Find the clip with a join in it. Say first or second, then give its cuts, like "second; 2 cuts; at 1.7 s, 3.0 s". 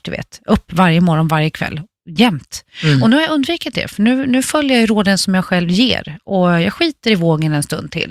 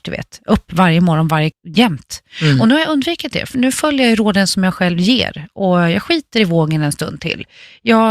second; 2 cuts; at 1.5 s, 3.5 s